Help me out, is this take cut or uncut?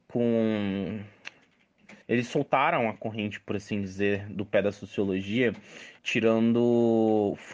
cut